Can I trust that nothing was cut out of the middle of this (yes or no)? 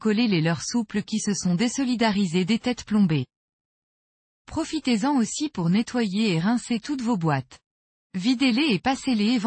yes